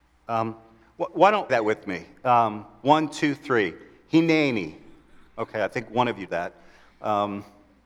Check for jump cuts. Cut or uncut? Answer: cut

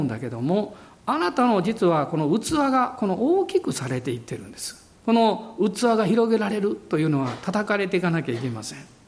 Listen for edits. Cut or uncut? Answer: cut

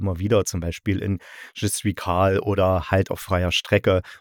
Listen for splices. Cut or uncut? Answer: uncut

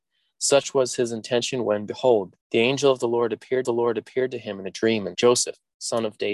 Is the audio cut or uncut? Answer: cut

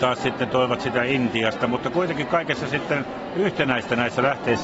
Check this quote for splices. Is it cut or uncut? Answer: uncut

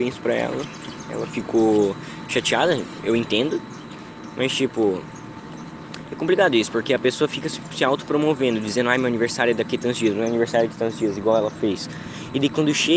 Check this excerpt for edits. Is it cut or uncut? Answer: uncut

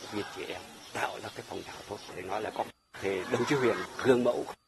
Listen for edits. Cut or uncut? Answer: uncut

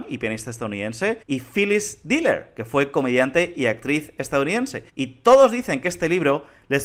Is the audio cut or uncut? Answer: cut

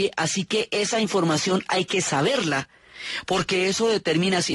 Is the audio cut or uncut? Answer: uncut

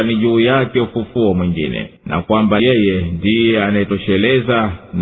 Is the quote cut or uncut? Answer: cut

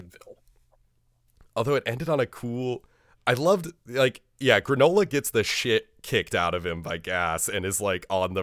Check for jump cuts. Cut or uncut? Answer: uncut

